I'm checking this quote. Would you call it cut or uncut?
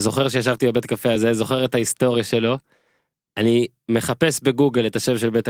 uncut